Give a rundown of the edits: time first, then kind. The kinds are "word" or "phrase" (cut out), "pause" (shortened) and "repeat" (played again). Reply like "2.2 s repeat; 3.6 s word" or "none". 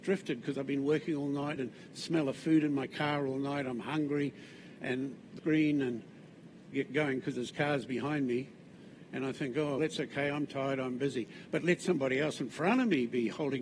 1.6 s phrase; 5.4 s word; 6.7 s phrase; 9.8 s word